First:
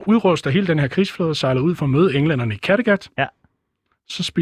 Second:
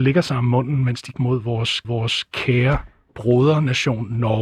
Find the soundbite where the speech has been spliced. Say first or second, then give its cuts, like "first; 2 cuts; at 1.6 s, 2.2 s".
second; 2 cuts; at 1.1 s, 1.8 s